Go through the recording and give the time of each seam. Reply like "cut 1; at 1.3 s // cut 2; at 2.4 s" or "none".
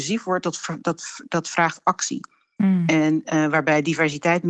none